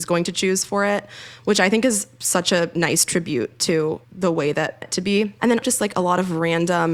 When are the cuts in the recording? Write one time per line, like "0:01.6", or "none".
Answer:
0:04.0
0:04.8
0:05.6